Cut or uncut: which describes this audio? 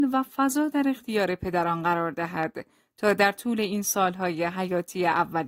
uncut